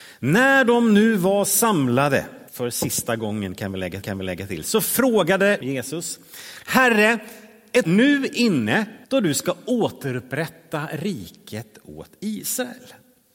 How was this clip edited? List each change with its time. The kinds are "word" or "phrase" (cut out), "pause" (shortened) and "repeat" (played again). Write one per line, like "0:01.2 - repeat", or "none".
0:02.5 - pause
0:04.0 - repeat
0:05.6 - phrase
0:07.8 - word
0:09.0 - pause